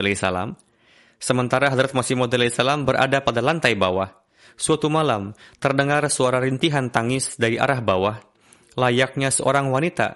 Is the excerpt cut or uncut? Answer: uncut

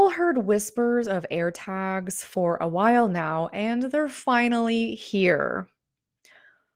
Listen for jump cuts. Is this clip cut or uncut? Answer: uncut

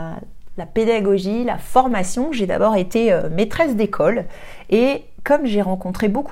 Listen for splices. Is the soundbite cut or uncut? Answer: uncut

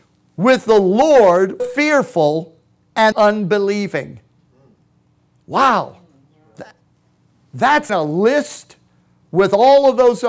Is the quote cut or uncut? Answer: cut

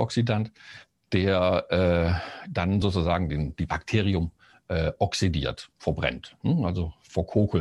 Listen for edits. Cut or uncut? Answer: uncut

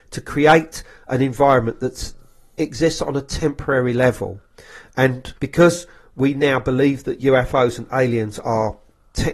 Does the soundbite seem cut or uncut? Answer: cut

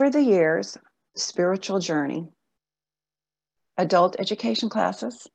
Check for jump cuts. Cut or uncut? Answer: cut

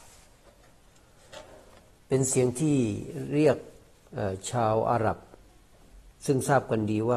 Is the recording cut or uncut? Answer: uncut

